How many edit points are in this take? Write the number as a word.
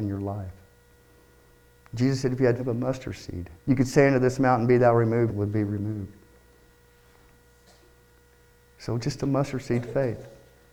three